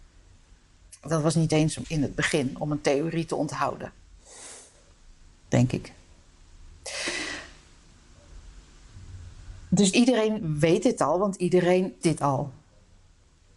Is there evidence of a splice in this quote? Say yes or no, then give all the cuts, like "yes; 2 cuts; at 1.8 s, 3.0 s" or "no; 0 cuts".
yes; 3 cuts; at 1.8 s, 9.9 s, 12.0 s